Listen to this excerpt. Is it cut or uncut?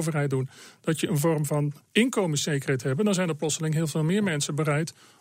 cut